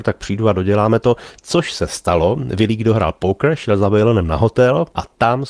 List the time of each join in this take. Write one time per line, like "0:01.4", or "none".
none